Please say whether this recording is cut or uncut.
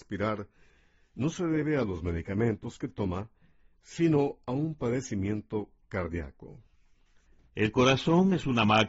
uncut